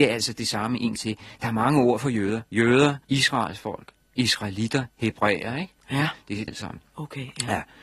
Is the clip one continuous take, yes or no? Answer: no